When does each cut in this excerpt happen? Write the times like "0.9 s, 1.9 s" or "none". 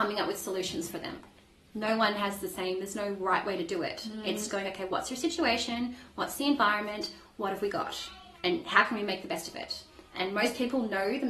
4.5 s, 8.4 s